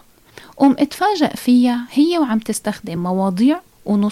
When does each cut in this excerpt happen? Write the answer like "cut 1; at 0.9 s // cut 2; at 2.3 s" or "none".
none